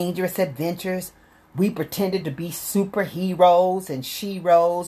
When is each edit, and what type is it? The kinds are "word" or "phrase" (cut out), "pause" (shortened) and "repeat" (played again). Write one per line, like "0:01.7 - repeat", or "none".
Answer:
none